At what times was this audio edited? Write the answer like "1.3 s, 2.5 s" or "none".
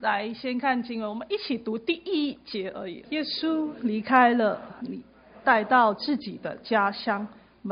3.0 s